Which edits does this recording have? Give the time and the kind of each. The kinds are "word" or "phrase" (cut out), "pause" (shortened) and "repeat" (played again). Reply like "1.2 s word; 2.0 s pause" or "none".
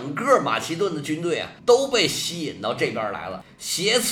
1.6 s pause